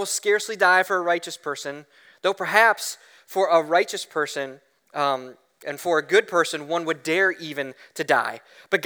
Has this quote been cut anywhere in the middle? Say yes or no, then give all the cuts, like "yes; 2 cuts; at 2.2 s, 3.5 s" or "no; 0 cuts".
no; 0 cuts